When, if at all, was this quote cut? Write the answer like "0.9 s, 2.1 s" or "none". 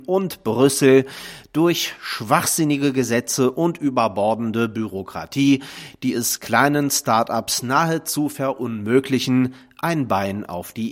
none